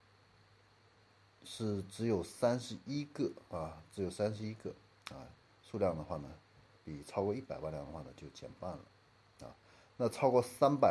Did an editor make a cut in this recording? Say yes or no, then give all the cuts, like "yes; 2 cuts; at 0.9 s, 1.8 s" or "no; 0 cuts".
no; 0 cuts